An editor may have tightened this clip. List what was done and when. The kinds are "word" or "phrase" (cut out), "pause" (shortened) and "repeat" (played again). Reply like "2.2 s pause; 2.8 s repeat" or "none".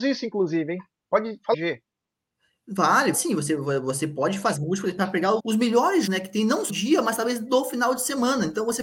1.5 s word; 3.1 s word; 4.5 s word; 5.4 s word; 6.1 s word; 6.7 s word